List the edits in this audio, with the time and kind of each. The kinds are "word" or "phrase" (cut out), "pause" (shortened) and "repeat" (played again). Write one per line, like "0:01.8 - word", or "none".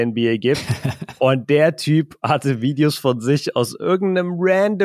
none